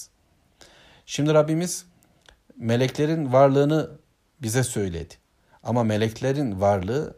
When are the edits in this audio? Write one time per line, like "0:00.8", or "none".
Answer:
none